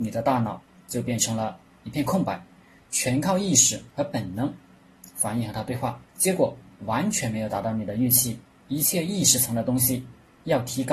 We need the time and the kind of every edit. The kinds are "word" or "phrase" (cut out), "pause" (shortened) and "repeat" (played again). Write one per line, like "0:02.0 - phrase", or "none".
0:06.1 - pause